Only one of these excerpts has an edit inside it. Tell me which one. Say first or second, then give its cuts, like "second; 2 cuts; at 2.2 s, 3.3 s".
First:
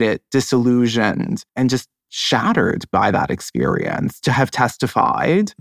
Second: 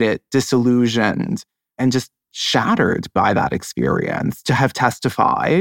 first; 1 cut; at 1.5 s